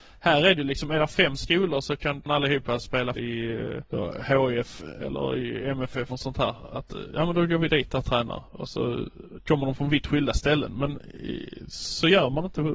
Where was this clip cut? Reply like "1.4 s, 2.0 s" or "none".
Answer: 3.1 s, 3.9 s, 6.1 s, 8.5 s